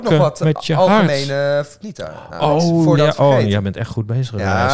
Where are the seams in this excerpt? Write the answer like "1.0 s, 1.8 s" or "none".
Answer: 1.8 s, 3.0 s